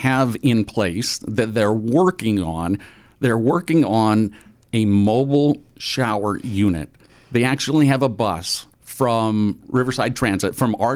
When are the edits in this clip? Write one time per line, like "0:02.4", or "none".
0:08.7